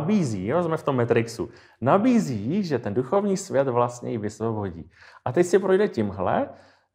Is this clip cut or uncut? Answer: uncut